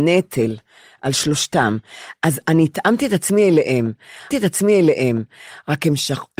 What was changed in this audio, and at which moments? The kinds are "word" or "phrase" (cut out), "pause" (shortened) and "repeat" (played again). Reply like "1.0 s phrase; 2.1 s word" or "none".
4.3 s repeat